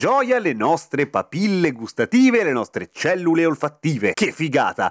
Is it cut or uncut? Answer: uncut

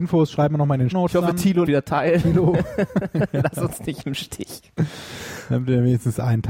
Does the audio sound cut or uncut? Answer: cut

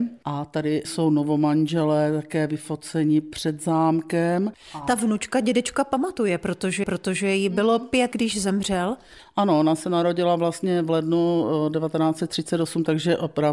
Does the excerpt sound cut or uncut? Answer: cut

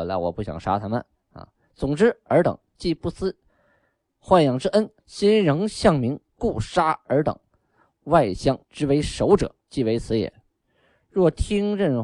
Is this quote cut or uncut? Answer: cut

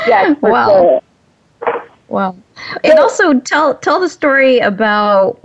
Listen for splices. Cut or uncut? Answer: uncut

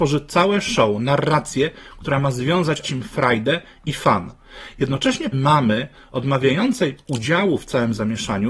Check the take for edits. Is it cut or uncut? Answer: cut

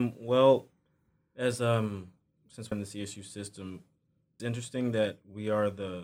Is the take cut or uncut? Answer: cut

